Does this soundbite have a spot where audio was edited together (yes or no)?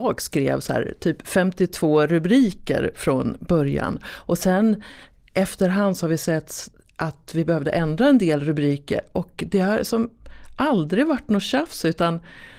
no